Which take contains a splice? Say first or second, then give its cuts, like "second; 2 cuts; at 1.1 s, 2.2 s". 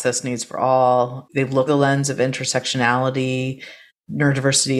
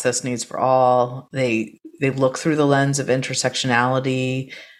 first; 3 cuts; at 1.3 s, 1.7 s, 3.9 s